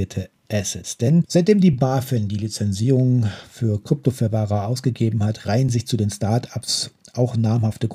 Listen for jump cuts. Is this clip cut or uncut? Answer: uncut